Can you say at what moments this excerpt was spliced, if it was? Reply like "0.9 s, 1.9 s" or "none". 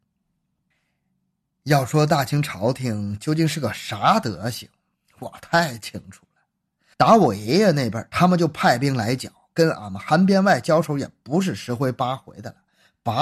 6.9 s